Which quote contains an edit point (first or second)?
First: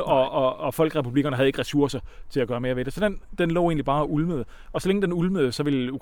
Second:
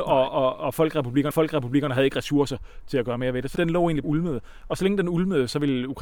second